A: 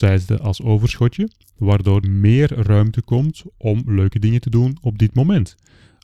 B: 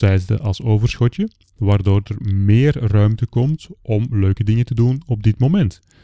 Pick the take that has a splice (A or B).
A